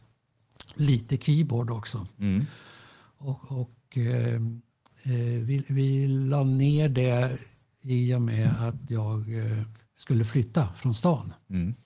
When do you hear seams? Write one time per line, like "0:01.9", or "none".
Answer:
none

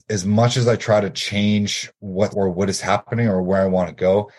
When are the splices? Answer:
0:02.3

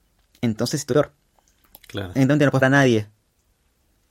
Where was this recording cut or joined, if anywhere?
0:00.9
0:02.6

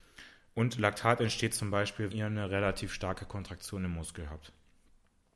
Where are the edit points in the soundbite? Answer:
0:02.1

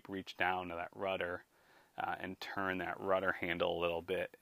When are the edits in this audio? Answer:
none

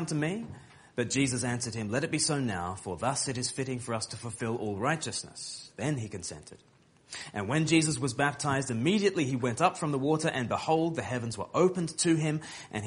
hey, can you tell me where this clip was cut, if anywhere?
none

